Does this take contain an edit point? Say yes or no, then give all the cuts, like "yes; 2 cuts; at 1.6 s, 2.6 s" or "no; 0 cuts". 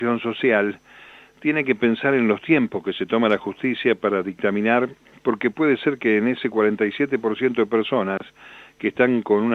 no; 0 cuts